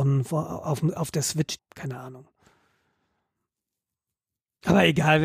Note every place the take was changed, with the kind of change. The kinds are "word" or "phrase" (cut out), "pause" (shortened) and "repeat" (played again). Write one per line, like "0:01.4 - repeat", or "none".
0:01.6 - word

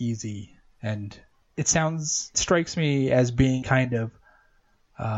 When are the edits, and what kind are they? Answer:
0:02.3 - word
0:03.6 - word

